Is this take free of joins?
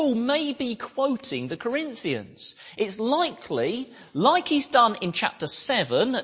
yes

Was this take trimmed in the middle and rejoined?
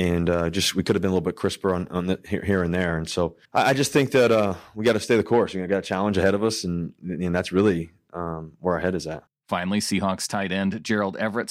yes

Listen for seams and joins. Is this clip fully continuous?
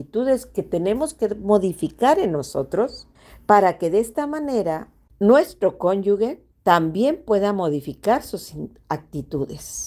no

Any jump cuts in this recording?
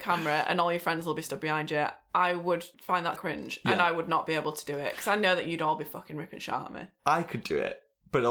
yes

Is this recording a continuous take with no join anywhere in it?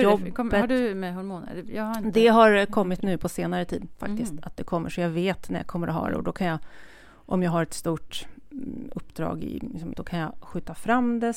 no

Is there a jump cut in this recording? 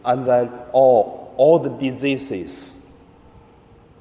no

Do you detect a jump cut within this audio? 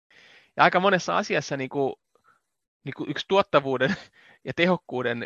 no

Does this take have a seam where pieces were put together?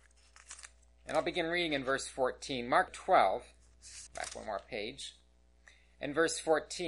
yes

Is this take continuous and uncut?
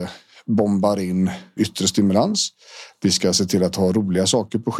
no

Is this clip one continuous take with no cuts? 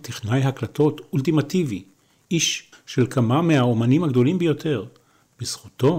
no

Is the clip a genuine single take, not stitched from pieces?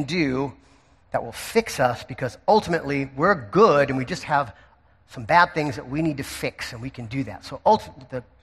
yes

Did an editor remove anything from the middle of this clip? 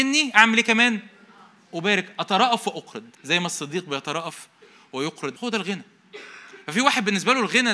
yes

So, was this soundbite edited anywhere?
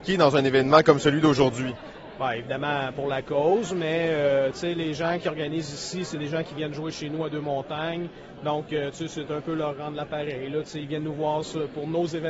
no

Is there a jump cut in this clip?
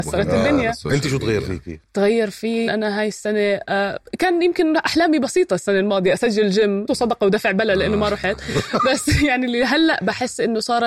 yes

